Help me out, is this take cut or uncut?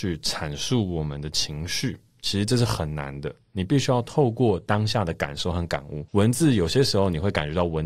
cut